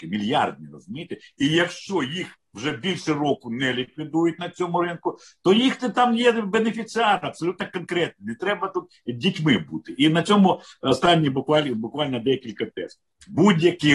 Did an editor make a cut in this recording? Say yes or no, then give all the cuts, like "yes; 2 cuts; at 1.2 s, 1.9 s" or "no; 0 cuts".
no; 0 cuts